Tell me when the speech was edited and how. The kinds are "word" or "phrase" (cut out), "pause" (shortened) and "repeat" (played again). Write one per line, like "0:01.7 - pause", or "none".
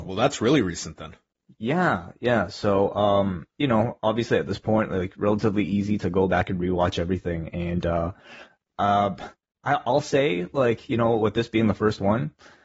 none